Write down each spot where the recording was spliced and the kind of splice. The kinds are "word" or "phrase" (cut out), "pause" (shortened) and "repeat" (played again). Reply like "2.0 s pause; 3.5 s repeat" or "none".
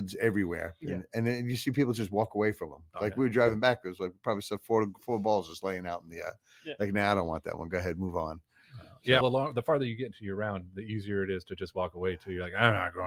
9.2 s word